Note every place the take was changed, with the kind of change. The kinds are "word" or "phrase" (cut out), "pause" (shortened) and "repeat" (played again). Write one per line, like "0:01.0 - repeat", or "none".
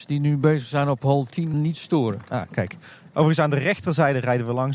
0:01.5 - word